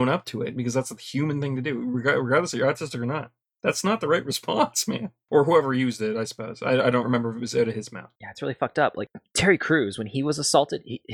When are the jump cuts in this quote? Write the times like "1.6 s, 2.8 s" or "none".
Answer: 8.1 s